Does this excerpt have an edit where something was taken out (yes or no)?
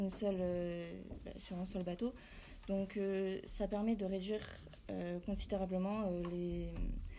no